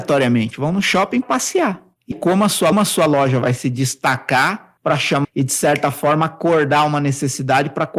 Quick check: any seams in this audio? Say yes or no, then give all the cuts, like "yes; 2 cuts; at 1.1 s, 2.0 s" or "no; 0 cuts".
yes; 5 cuts; at 1.2 s, 2.1 s, 2.7 s, 4.8 s, 5.2 s